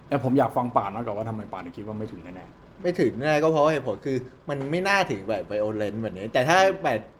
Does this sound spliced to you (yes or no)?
no